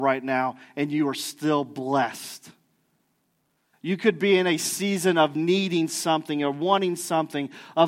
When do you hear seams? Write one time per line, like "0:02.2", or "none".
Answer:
none